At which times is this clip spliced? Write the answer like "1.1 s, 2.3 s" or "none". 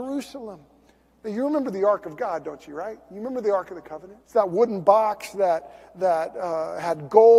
4.2 s